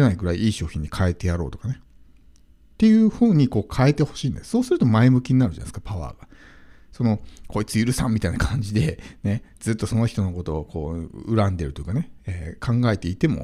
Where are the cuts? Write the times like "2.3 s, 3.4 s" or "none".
none